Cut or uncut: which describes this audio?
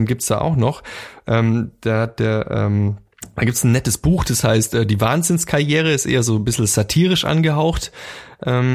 uncut